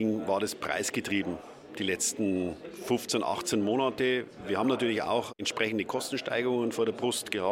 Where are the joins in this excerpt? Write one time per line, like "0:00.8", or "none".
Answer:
none